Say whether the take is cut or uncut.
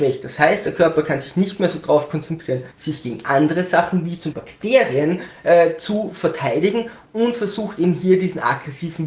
cut